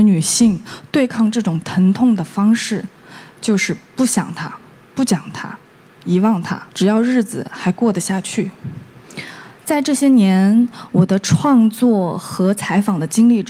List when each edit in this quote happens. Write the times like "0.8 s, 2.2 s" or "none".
6.7 s

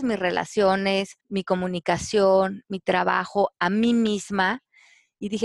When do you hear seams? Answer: 1.2 s

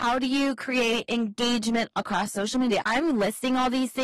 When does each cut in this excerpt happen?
none

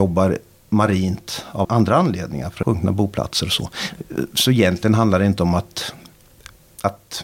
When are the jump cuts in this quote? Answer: 1.6 s, 2.6 s

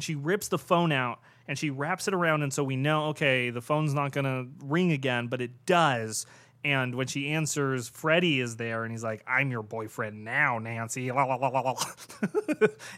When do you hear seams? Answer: none

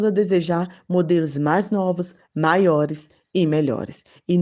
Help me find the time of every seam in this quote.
none

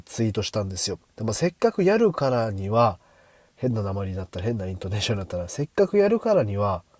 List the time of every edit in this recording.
1.1 s

